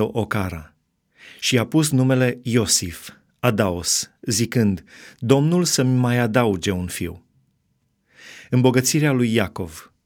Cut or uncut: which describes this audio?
uncut